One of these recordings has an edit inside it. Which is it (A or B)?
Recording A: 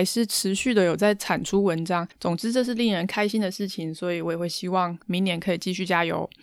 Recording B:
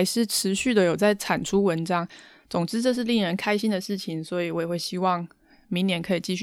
A